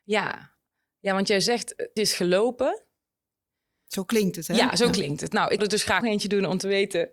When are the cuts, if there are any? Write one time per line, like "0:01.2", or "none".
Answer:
0:02.0
0:05.6
0:06.0